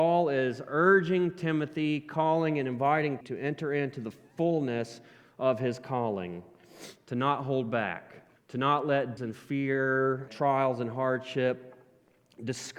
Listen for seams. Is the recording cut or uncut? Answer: cut